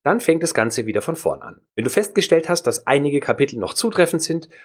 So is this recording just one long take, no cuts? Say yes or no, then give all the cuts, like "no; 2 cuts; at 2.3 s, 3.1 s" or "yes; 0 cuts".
no; 1 cut; at 1.7 s